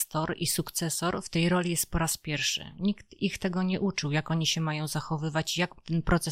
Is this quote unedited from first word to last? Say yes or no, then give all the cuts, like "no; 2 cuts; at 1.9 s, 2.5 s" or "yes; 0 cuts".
yes; 0 cuts